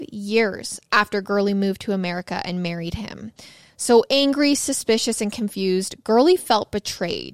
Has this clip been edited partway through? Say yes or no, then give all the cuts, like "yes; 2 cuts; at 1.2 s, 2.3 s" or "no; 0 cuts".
no; 0 cuts